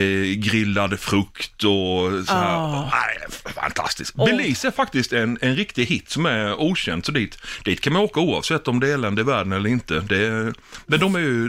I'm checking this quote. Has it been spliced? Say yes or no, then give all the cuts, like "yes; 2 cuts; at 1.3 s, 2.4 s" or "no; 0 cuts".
no; 0 cuts